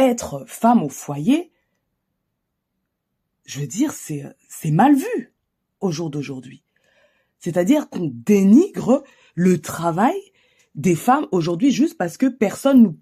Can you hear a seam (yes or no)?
no